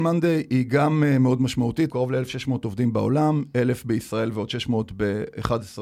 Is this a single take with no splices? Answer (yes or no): no